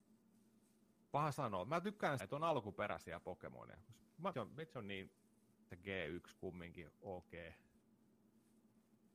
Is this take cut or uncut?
cut